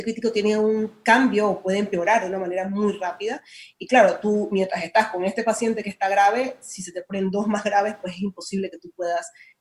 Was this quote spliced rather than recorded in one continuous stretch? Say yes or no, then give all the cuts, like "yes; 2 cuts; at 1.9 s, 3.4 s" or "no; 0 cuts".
no; 0 cuts